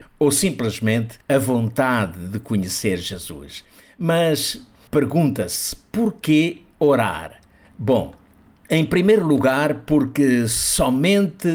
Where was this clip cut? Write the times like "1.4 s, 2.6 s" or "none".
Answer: none